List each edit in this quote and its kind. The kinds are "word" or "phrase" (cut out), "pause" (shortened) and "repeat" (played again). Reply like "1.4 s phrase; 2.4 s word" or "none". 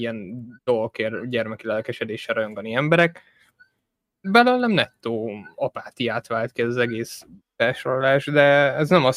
none

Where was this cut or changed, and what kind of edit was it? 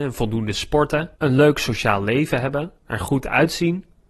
1.1 s pause; 2.8 s pause

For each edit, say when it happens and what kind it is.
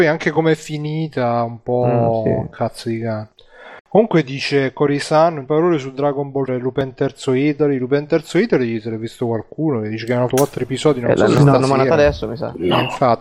5.5 s word; 6.5 s word; 10.3 s word

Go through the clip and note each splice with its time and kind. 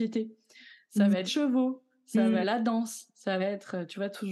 1.3 s word; 2.4 s word; 3.4 s word

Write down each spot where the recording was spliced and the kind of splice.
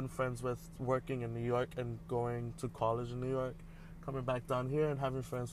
none

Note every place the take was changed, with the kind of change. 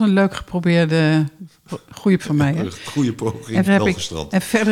2.2 s word; 3.7 s word

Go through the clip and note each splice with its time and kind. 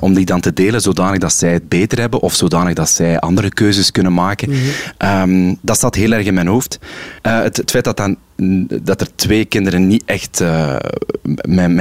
none

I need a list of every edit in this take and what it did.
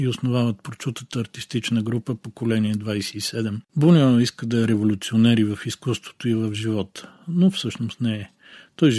3.7 s pause

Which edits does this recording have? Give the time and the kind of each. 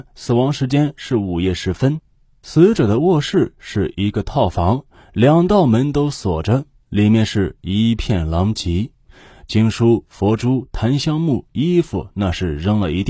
none

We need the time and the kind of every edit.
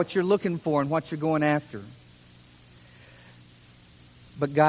none

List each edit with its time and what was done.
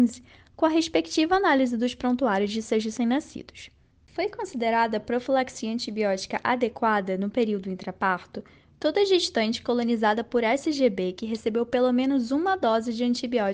none

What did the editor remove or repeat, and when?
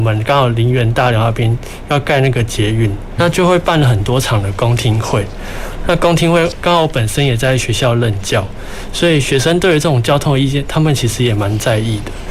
3.2 s word

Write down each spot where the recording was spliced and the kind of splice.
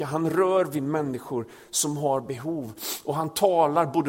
none

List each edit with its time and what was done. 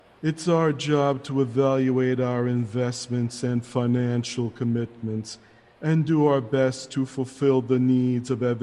none

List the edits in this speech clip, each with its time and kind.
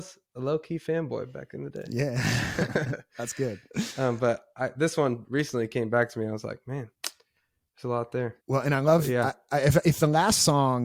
6.9 s pause; 8.4 s pause

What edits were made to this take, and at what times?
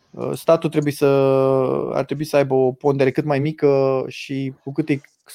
none

